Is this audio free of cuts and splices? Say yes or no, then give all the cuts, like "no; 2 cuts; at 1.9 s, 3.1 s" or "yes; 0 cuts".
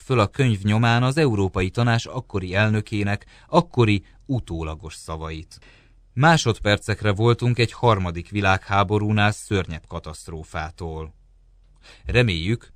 yes; 0 cuts